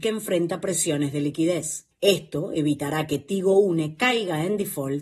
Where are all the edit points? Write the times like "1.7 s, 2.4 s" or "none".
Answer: 1.9 s